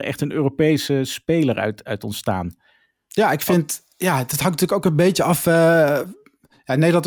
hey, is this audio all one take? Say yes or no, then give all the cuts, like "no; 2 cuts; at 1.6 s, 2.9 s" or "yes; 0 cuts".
yes; 0 cuts